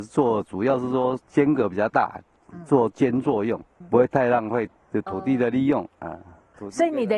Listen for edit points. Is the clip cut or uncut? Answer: cut